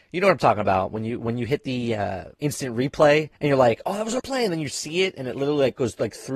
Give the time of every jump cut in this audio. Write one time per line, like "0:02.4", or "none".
0:02.3
0:03.4
0:04.2